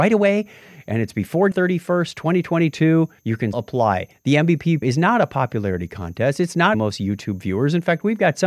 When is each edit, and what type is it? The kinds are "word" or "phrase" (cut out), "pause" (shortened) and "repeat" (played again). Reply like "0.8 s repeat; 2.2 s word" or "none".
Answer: 1.5 s word; 3.2 s pause; 3.5 s word; 4.8 s word; 6.7 s phrase